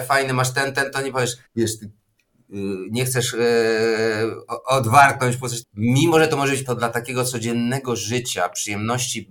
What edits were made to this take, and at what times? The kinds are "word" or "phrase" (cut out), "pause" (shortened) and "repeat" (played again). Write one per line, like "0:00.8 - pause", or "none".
0:01.4 - pause
0:05.6 - word
0:06.6 - word